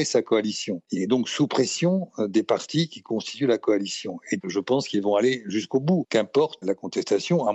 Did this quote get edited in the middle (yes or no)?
yes